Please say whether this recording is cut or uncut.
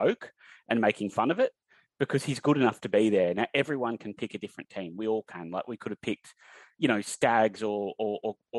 uncut